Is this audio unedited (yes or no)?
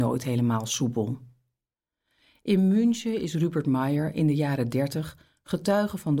yes